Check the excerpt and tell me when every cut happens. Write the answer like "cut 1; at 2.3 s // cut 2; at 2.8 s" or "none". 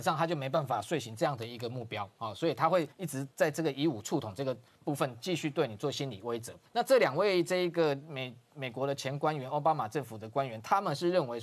cut 1; at 2.9 s // cut 2; at 3.3 s // cut 3; at 6.7 s